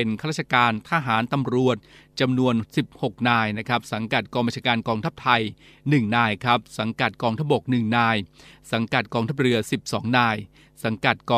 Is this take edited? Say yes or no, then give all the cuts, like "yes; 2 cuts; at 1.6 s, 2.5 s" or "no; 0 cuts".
no; 0 cuts